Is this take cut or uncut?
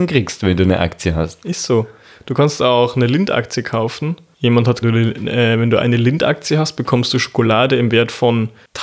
cut